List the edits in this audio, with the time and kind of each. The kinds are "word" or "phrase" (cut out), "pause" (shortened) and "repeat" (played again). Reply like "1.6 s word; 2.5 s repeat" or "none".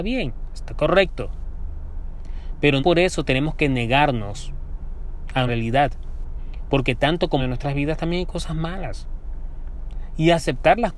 2.8 s word; 5.5 s word; 7.4 s phrase